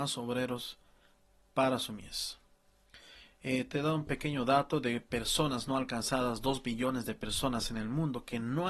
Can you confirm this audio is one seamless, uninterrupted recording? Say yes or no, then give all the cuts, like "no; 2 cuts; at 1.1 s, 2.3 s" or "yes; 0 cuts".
yes; 0 cuts